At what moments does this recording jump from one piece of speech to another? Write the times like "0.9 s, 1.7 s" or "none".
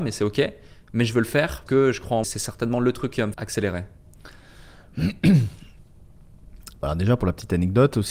1.7 s, 2.2 s, 3.3 s